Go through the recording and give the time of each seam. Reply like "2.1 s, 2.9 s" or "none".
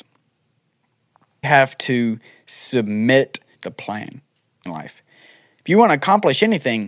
1.4 s, 3.5 s, 4.7 s